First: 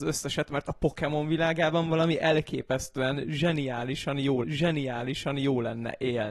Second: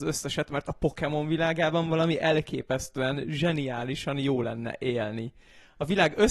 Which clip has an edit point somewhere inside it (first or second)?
first